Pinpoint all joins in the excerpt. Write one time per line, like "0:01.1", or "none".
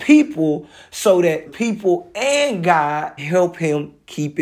0:01.5
0:03.2